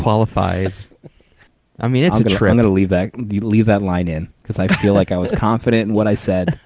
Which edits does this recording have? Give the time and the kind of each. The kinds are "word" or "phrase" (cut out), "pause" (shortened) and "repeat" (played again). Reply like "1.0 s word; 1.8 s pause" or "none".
1.5 s pause; 4.4 s pause